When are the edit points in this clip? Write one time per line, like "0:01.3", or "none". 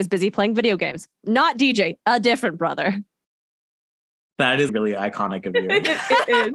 0:04.7